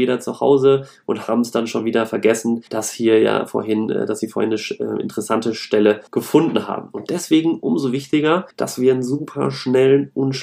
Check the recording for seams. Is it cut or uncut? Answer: cut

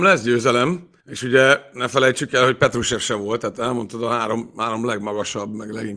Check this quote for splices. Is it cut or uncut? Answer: cut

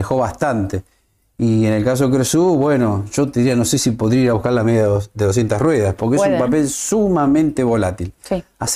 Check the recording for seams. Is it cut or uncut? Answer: uncut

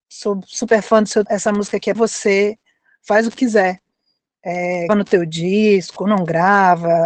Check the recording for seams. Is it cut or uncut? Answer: cut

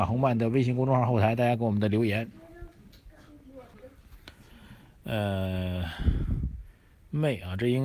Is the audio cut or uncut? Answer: uncut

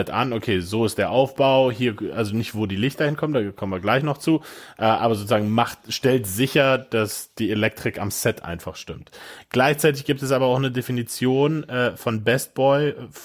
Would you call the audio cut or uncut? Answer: uncut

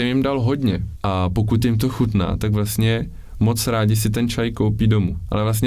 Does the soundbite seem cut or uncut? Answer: uncut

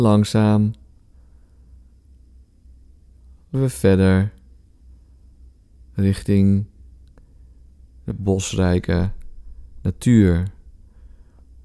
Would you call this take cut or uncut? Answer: cut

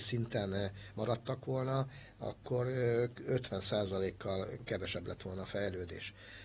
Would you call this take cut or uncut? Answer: uncut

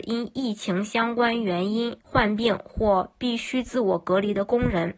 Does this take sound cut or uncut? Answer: cut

